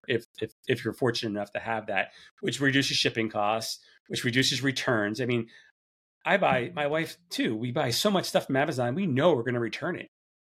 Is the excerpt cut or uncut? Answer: uncut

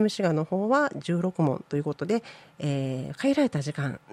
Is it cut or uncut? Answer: uncut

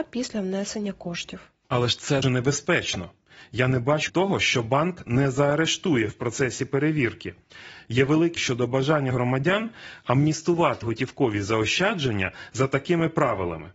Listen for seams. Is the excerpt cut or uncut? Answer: cut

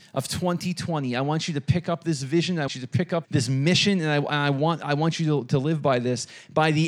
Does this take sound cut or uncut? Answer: cut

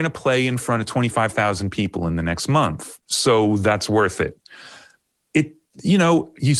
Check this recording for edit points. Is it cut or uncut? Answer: uncut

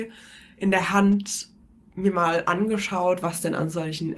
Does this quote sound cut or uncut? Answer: uncut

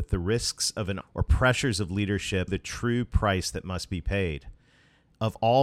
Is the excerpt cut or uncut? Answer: cut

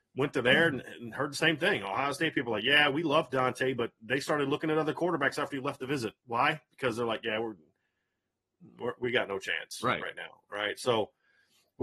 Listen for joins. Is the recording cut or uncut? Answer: uncut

